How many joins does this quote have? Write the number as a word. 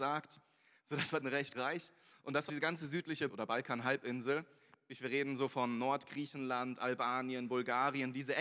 four